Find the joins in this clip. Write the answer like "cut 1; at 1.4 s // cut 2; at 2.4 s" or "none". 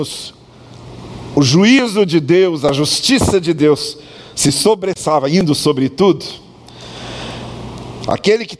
none